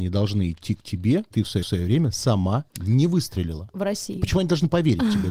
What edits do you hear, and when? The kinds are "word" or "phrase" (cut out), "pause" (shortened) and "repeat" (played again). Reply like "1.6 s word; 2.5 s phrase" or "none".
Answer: 1.3 s word; 1.6 s repeat; 2.7 s pause

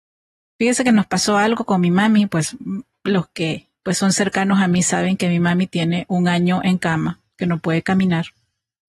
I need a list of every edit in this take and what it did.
none

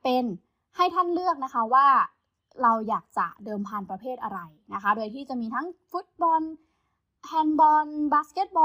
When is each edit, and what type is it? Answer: none

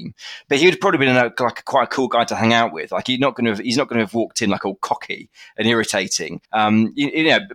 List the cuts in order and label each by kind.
6.4 s pause

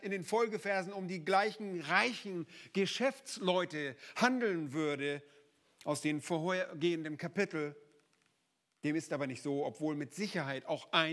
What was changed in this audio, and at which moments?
none

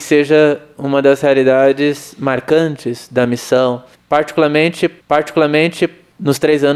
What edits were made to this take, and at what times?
5.0 s repeat

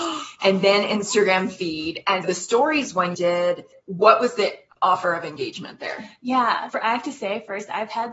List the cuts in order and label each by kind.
2.2 s word; 3.1 s word; 6.7 s word

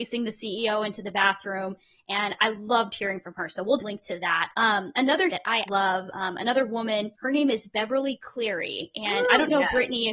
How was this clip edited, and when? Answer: 2.4 s word; 3.8 s word; 4.5 s pause; 5.3 s phrase; 5.7 s word; 7.1 s pause

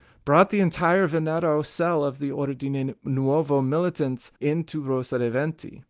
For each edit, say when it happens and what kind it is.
4.4 s pause

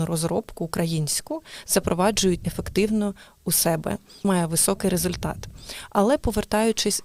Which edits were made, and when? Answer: 2.4 s word; 4.2 s phrase

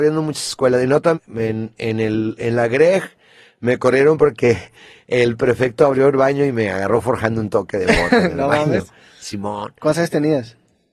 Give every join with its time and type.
1.1 s word

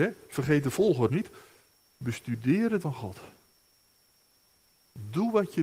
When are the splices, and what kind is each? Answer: 1.1 s word; 2.8 s word

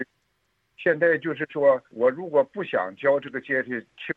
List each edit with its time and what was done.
1.9 s pause

